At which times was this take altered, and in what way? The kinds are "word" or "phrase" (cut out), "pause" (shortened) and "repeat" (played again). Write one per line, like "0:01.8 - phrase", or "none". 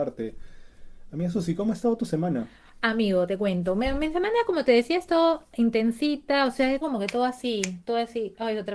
0:06.8 - word